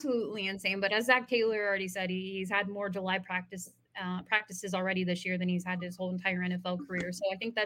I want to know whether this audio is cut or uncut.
uncut